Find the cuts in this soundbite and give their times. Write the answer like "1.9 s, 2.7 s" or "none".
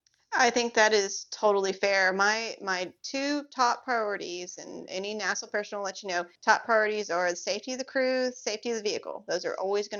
6.4 s